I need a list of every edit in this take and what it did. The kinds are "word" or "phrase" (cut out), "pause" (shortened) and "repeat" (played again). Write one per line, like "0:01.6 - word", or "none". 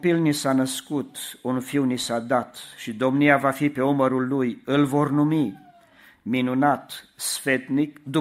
none